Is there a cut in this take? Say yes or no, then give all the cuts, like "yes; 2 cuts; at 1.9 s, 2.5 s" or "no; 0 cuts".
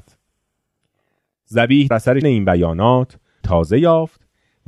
yes; 3 cuts; at 1.9 s, 2.2 s, 3.4 s